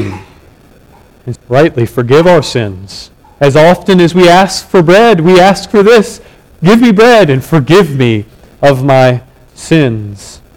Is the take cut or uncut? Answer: cut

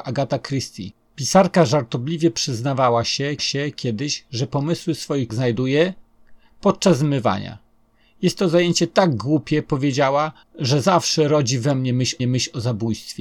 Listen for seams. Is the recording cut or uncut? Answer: cut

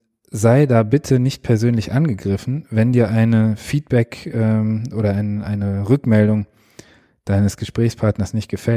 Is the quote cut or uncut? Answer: uncut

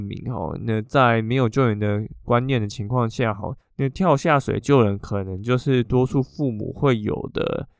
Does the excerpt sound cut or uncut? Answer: cut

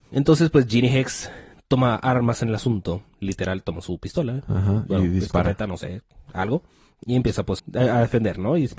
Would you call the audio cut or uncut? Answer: cut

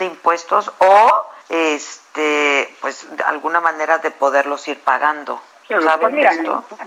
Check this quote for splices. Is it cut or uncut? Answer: cut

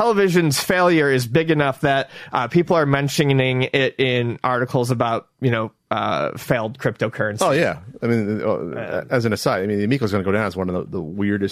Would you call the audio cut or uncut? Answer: uncut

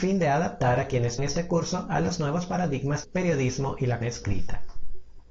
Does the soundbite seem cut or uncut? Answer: cut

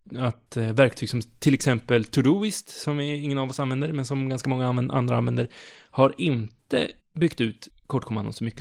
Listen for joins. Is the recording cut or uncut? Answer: uncut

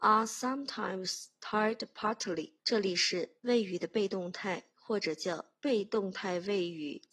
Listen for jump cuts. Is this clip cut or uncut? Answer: cut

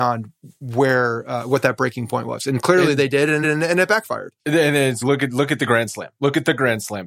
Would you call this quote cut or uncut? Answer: cut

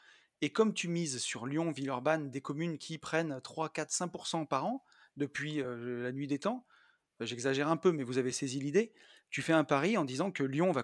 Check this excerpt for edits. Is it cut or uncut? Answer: uncut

